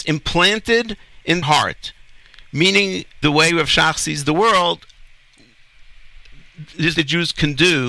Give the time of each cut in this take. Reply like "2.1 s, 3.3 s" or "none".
1.4 s, 3.2 s, 7.0 s